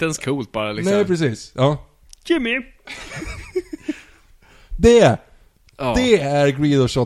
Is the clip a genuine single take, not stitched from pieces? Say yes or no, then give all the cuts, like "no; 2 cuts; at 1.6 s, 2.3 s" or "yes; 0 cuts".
yes; 0 cuts